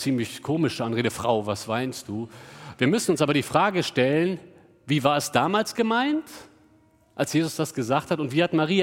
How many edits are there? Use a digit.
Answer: 0